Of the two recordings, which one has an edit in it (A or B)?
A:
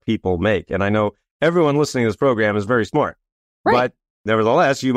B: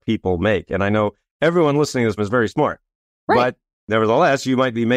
B